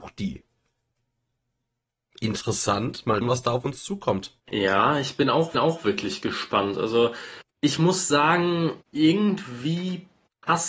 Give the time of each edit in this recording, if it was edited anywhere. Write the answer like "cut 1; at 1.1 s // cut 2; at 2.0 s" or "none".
cut 1; at 3.2 s // cut 2; at 4.4 s // cut 3; at 5.5 s // cut 4; at 7.5 s // cut 5; at 8.8 s

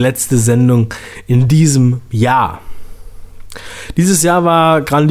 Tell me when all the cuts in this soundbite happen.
none

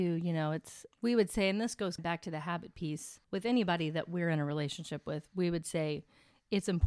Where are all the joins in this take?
cut 1; at 0.9 s // cut 2; at 2.0 s // cut 3; at 3.2 s

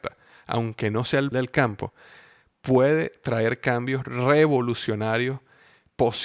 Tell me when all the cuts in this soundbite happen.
cut 1; at 1.3 s

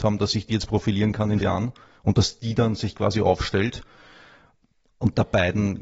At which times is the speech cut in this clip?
cut 1; at 1.4 s

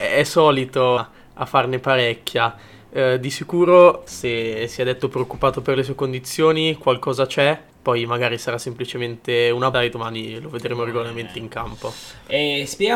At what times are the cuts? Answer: cut 1; at 1.0 s // cut 2; at 4.1 s // cut 3; at 7.7 s // cut 4; at 9.7 s

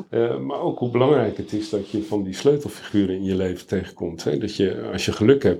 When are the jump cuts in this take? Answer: none

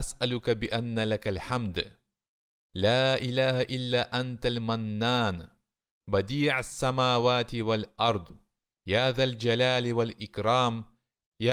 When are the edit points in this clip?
none

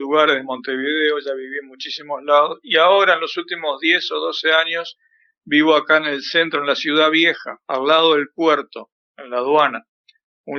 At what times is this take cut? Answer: none

